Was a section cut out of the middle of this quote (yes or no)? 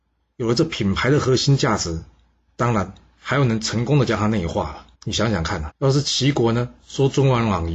yes